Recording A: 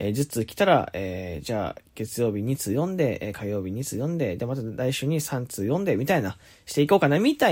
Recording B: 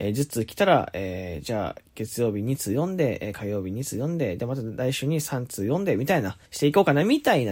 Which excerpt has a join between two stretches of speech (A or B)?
B